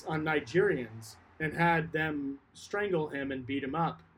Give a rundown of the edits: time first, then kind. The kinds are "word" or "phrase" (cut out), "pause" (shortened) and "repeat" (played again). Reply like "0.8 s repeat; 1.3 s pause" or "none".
none